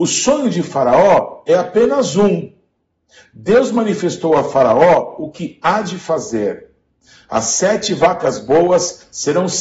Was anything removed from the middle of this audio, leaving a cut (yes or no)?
no